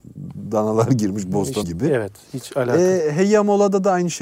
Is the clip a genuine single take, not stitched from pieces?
no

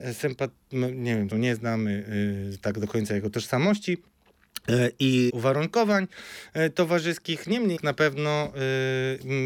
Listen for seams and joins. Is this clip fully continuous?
no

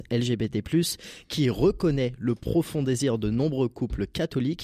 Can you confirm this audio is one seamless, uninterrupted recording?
yes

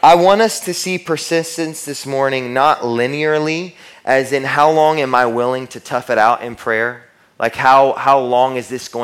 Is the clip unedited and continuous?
yes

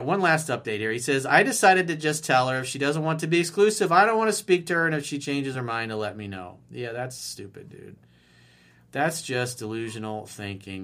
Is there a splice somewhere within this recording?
no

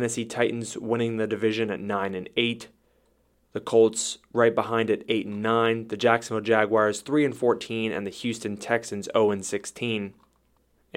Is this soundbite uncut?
yes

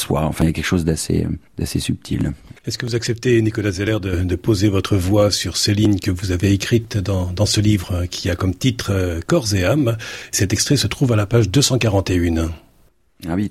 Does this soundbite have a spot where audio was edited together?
yes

